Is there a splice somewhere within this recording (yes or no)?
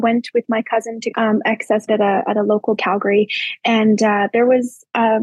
yes